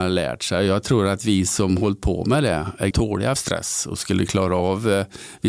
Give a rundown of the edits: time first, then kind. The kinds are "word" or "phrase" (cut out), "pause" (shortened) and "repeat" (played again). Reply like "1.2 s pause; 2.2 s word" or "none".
2.9 s word; 3.4 s word